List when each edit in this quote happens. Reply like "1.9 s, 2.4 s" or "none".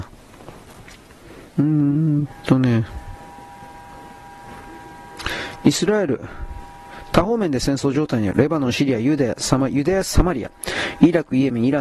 1.5 s